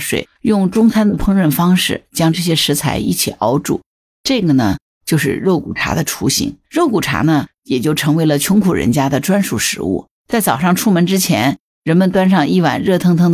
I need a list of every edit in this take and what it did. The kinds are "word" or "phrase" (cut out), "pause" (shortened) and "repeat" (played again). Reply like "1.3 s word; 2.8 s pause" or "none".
6.6 s pause; 10.1 s pause